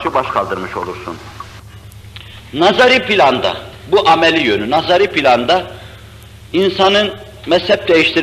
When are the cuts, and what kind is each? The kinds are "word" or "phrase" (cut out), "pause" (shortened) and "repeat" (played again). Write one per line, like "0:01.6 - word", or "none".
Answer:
none